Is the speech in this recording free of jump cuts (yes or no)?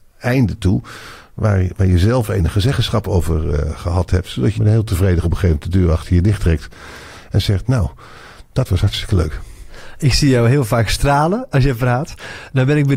no